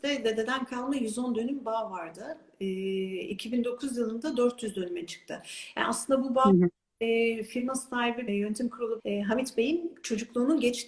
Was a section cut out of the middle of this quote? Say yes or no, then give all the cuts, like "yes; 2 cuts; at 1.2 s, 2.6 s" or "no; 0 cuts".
yes; 2 cuts; at 8.3 s, 9.0 s